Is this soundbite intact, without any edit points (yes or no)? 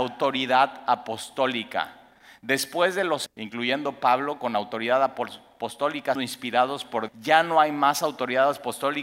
no